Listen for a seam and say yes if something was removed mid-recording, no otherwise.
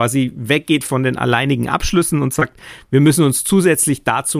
no